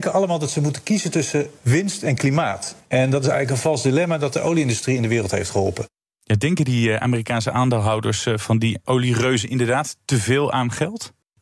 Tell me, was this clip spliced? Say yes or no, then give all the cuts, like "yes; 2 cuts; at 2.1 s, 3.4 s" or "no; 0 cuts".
yes; 1 cut; at 8.8 s